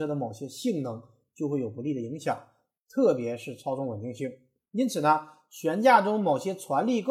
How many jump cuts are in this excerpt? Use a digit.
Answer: 0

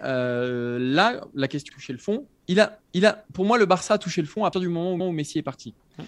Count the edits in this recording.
4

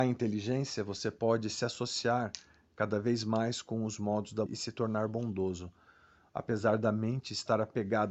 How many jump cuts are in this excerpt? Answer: 1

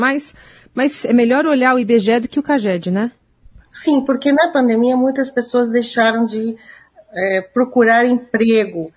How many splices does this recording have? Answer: 0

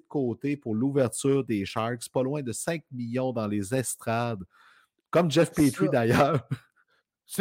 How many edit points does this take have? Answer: 0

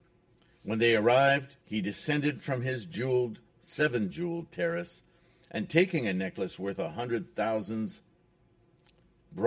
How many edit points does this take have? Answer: 1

